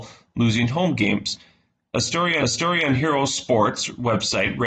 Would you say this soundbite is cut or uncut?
cut